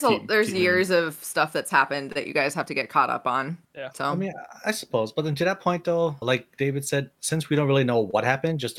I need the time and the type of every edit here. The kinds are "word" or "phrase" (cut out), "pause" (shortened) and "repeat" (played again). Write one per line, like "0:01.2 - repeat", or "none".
0:03.6 - pause
0:06.2 - word